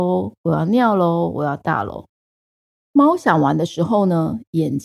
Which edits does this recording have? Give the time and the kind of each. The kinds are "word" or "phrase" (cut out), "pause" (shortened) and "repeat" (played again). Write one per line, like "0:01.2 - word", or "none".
0:02.1 - pause

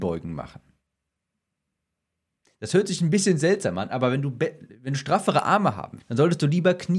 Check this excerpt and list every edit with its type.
0:06.0 - word

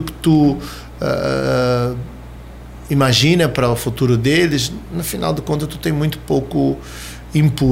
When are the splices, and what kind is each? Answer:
none

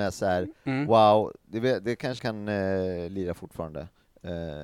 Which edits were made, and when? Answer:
0:02.2 - word

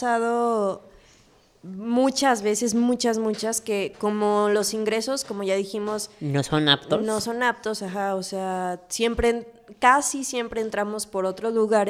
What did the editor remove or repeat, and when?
none

